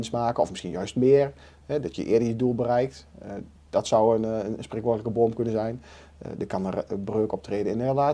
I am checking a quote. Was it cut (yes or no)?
no